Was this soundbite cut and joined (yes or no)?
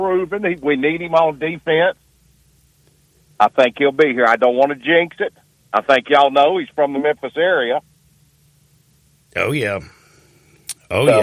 no